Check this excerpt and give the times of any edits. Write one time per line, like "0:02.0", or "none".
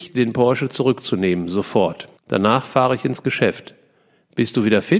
0:02.2